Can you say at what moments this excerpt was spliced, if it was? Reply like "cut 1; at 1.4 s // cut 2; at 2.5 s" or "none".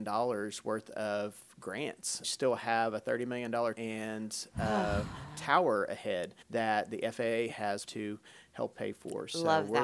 cut 1; at 2.2 s // cut 2; at 3.7 s // cut 3; at 6.4 s // cut 4; at 7.9 s // cut 5; at 8.7 s

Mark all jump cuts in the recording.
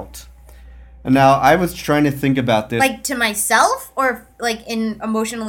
none

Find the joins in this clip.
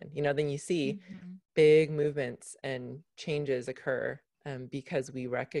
cut 1; at 1.4 s // cut 2; at 4.3 s

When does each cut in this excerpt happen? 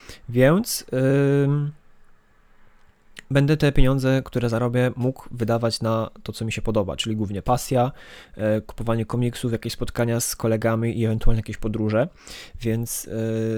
none

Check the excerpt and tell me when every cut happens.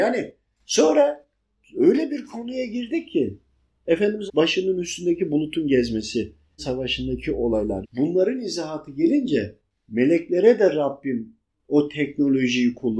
cut 1; at 4.3 s // cut 2; at 6.6 s // cut 3; at 7.8 s

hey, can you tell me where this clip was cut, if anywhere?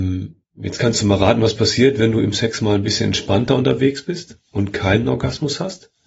none

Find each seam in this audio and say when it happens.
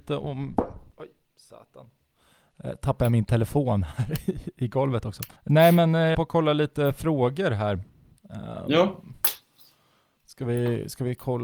cut 1; at 0.9 s // cut 2; at 5.4 s // cut 3; at 6.1 s

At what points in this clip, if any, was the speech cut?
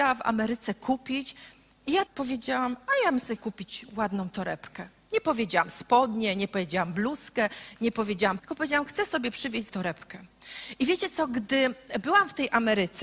cut 1; at 2.1 s // cut 2; at 3.4 s // cut 3; at 8.4 s // cut 4; at 9.7 s

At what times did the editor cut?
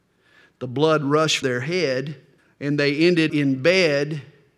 cut 1; at 1.4 s // cut 2; at 2.4 s // cut 3; at 3.3 s

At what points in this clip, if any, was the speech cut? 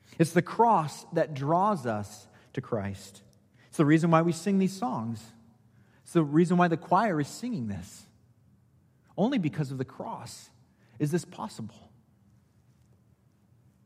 none

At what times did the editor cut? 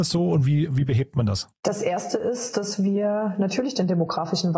cut 1; at 1.6 s

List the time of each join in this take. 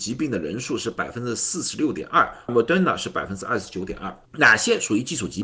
cut 1; at 2.5 s // cut 2; at 4.3 s

